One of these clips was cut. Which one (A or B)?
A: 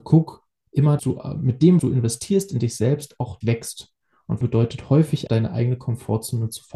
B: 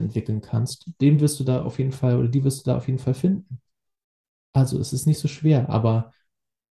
A